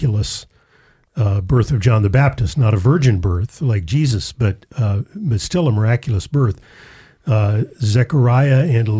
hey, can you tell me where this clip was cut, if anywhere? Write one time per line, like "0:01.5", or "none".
none